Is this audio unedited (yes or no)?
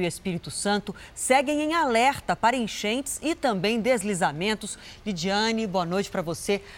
yes